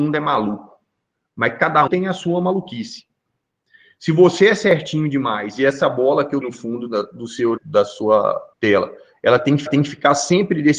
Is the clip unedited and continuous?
no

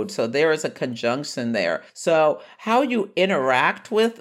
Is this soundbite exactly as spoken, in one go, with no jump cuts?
no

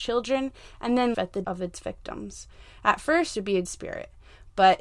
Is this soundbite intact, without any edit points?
no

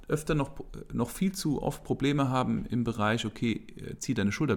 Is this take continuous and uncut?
yes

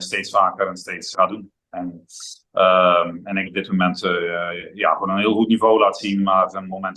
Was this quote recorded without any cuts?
no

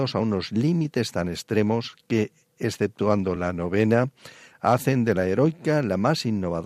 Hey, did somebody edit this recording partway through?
no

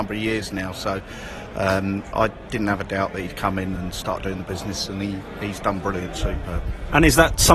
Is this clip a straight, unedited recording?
yes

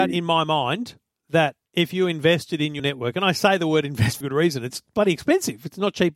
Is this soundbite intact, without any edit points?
no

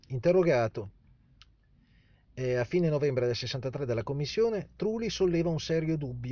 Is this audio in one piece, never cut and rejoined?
yes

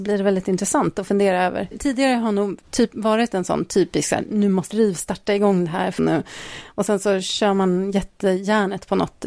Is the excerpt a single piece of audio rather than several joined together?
no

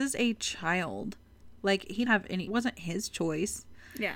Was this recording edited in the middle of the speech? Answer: yes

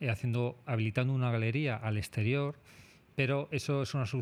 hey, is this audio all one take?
yes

